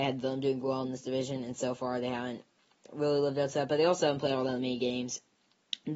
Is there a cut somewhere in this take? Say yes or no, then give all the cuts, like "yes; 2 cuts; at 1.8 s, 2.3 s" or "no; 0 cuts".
no; 0 cuts